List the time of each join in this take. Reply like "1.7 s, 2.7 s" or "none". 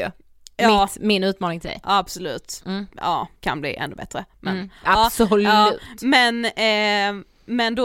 3.4 s

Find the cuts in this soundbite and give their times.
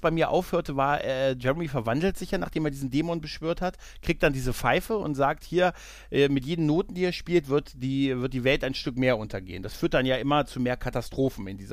none

